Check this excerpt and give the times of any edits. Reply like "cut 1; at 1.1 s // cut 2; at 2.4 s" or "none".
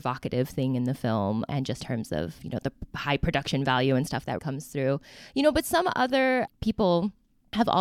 cut 1; at 1.5 s // cut 2; at 1.8 s // cut 3; at 4.4 s